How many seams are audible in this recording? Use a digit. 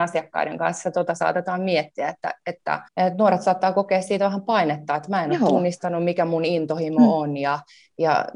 1